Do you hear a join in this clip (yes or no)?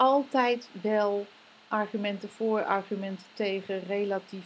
no